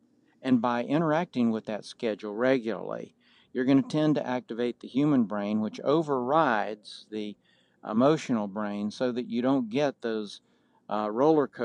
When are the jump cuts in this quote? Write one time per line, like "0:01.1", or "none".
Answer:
none